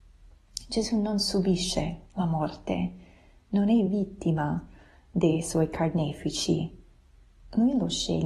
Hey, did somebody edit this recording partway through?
no; 0 cuts

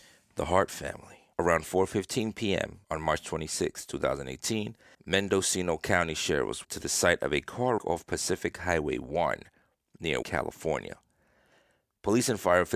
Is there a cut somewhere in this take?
yes; 6 cuts; at 1.3 s, 2.8 s, 4.9 s, 6.6 s, 7.8 s, 10.2 s

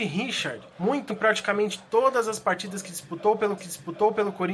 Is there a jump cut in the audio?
yes; 2 cuts; at 1.1 s, 3.6 s

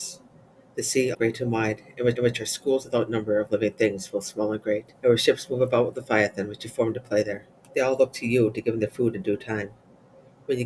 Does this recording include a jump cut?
yes; 4 cuts; at 1.1 s, 2.2 s, 5.0 s, 7.6 s

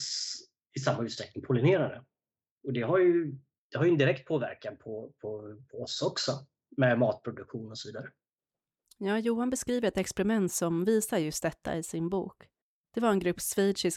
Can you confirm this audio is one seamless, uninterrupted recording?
yes; 0 cuts

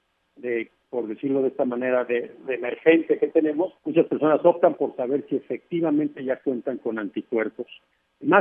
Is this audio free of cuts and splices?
no; 1 cut; at 3.8 s

